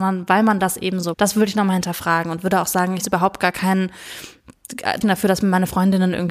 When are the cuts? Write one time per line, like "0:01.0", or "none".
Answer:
0:01.1
0:03.0
0:05.0